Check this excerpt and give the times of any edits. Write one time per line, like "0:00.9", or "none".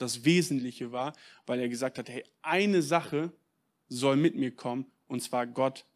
none